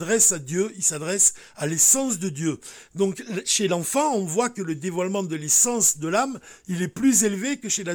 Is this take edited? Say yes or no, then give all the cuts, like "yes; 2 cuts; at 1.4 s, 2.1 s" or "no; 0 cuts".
no; 0 cuts